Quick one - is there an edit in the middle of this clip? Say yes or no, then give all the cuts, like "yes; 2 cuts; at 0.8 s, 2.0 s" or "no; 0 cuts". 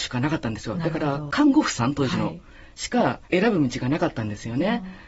yes; 1 cut; at 3.2 s